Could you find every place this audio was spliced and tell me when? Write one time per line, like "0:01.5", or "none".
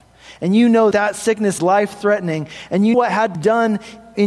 0:00.9
0:01.6
0:02.9
0:03.3